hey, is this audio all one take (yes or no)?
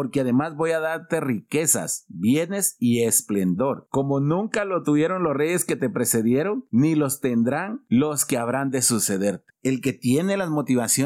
yes